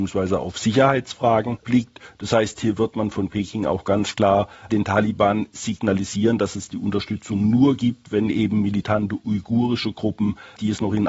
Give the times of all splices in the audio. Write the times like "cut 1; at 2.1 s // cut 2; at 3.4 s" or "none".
none